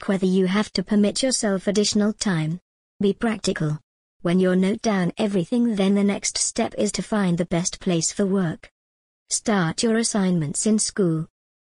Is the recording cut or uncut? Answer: uncut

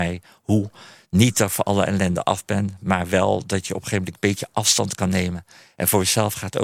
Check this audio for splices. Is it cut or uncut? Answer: uncut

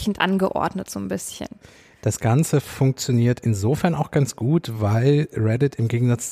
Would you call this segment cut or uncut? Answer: uncut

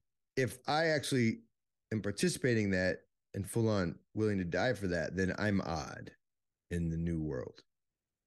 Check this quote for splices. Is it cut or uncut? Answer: uncut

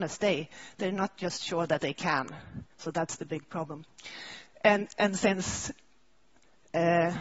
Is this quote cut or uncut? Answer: cut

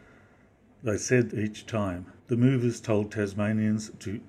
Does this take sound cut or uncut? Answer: cut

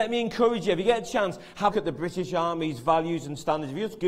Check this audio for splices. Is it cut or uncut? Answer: cut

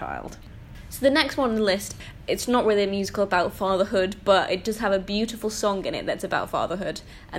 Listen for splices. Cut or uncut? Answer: uncut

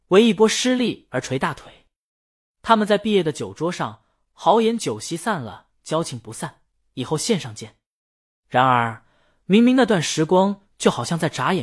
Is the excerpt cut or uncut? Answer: uncut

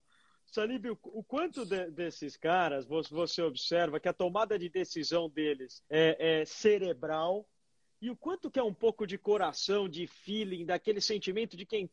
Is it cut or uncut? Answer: cut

